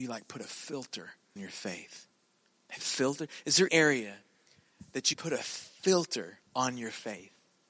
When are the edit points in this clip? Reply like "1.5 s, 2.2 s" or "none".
1.4 s, 2.8 s, 3.7 s, 5.1 s, 6.5 s